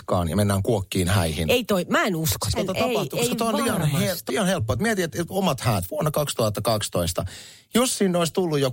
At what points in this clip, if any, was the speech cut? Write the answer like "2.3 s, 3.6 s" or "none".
2.6 s, 4.3 s